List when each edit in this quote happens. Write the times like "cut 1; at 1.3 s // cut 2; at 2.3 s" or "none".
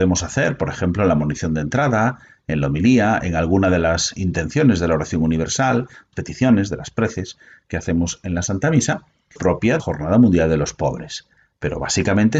cut 1; at 6.1 s // cut 2; at 9.4 s // cut 3; at 9.8 s